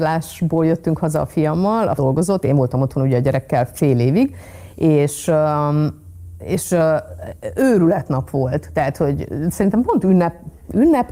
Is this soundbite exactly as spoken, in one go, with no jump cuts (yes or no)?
no